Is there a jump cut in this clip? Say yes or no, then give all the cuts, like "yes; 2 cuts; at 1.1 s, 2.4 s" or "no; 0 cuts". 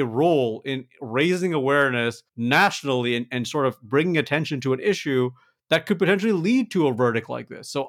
yes; 1 cut; at 2.3 s